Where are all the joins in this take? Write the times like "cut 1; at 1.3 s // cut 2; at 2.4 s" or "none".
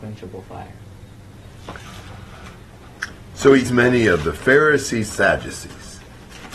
cut 1; at 3.7 s // cut 2; at 5.1 s